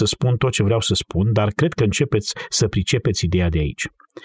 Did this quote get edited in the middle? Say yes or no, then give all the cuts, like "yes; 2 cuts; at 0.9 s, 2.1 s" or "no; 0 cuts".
no; 0 cuts